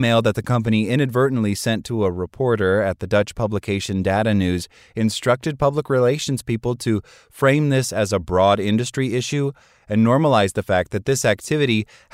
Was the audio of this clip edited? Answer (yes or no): no